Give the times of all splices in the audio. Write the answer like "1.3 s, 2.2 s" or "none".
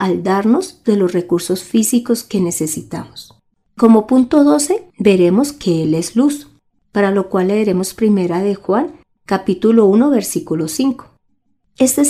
4.9 s